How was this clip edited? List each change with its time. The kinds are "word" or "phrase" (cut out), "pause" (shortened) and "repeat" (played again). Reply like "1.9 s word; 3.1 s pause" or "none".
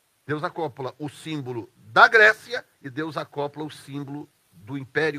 2.7 s pause